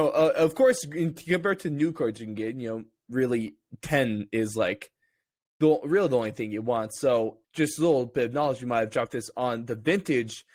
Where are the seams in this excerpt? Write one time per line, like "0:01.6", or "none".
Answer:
0:07.4